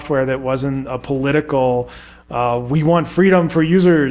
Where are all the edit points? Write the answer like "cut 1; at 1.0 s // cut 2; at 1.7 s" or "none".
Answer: none